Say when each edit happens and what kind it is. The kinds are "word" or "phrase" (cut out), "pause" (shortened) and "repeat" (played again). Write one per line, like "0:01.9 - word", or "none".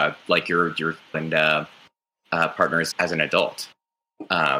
0:01.1 - word
0:02.9 - word